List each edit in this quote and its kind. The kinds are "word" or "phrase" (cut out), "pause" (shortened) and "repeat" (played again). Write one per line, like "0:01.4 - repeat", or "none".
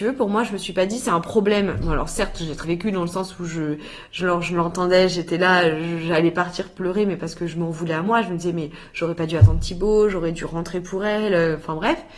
0:02.6 - word